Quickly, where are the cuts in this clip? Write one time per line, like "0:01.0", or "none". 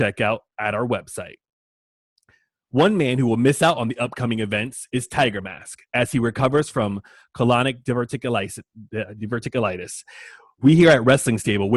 none